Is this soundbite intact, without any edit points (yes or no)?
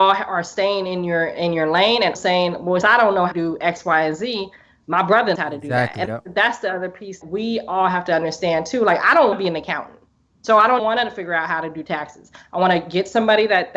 no